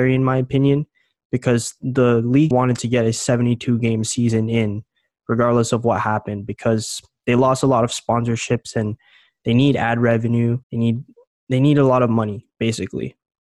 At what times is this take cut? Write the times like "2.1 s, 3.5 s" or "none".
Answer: 2.5 s, 10.6 s